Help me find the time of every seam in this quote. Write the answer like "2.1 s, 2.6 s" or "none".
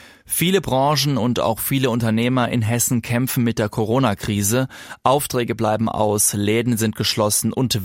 none